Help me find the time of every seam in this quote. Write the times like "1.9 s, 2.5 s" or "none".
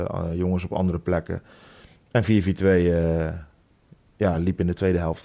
none

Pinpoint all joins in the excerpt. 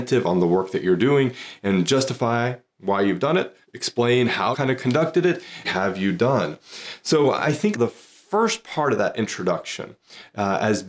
3.6 s, 4.5 s, 5.6 s, 7.7 s

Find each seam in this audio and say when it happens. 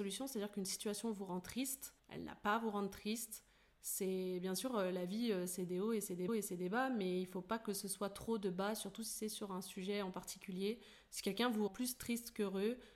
2.0 s, 6.3 s, 11.7 s

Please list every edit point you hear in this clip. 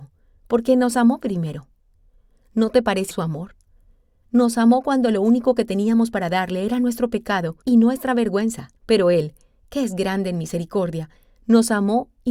3.1 s, 7.6 s, 8.8 s

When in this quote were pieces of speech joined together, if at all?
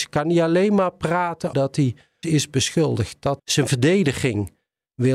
1.5 s, 2.2 s, 3.4 s

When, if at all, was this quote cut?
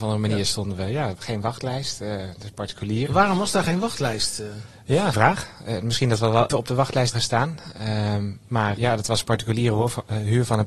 5.1 s, 6.5 s, 7.1 s, 8.8 s

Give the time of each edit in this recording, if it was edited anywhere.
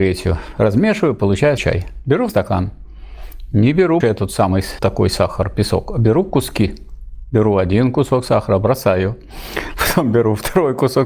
1.6 s, 2.3 s, 4.0 s, 4.8 s

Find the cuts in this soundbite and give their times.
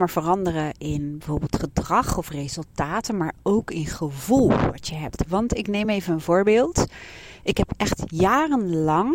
none

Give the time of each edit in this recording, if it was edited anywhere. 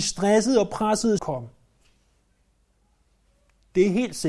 1.2 s

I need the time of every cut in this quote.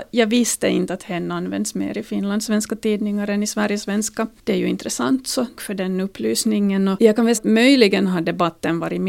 5.6 s, 7.3 s

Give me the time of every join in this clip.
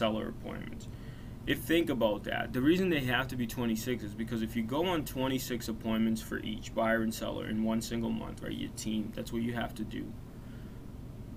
1.6 s

